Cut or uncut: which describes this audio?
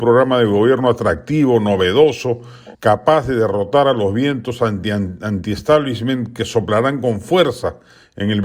cut